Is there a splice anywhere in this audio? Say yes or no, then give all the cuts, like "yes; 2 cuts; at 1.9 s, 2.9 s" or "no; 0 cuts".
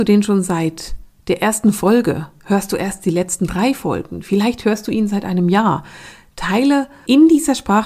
no; 0 cuts